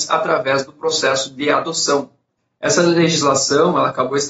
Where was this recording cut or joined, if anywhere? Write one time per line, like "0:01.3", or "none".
0:02.4